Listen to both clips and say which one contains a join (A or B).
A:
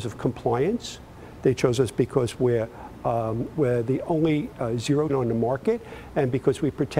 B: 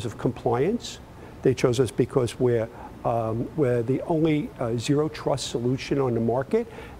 A